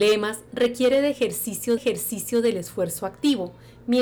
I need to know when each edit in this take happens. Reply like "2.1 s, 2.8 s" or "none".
1.8 s